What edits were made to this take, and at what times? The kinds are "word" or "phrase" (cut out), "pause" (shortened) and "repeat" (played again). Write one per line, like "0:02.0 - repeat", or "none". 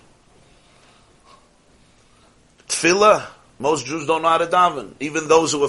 none